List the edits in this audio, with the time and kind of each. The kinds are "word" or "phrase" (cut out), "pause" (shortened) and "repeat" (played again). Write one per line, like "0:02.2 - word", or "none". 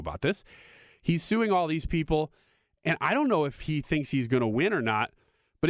none